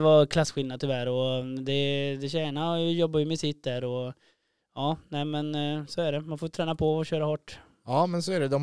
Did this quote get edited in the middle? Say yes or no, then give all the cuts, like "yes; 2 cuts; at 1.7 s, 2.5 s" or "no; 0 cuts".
no; 0 cuts